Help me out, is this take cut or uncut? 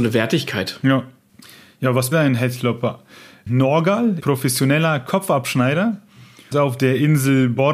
cut